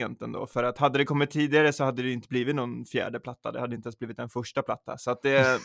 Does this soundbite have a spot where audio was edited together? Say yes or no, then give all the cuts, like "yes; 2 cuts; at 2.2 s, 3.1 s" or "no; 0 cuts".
no; 0 cuts